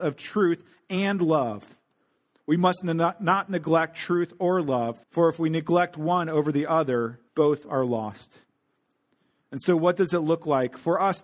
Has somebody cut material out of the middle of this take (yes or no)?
yes